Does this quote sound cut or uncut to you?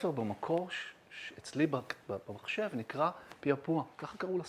uncut